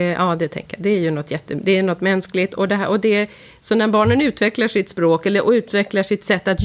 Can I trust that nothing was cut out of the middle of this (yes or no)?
yes